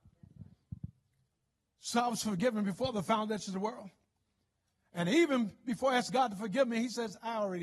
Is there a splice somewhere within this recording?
no; 0 cuts

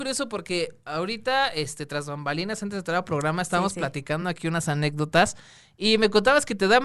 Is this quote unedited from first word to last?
yes; 0 cuts

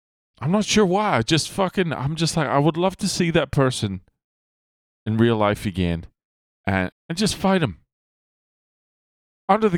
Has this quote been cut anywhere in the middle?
yes; 1 cut; at 6.9 s

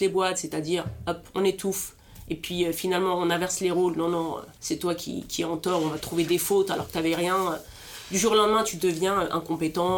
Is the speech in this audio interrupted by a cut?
yes; 1 cut; at 4.6 s

